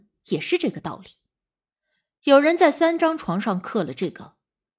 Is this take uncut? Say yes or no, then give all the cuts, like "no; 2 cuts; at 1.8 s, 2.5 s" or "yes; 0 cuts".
yes; 0 cuts